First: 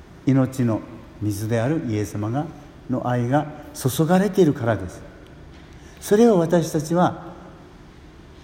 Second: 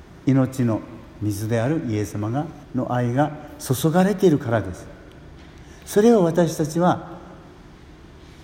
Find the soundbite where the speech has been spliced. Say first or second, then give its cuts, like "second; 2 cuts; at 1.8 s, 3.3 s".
second; 1 cut; at 2.6 s